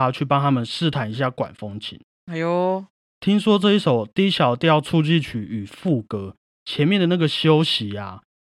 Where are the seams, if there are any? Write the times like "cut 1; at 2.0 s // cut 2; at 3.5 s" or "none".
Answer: none